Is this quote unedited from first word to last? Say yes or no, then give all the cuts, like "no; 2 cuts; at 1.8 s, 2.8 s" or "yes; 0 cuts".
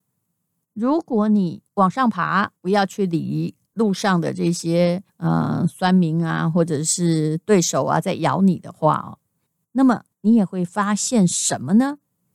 no; 6 cuts; at 1.7 s, 2.6 s, 3.7 s, 5.1 s, 9.5 s, 10.1 s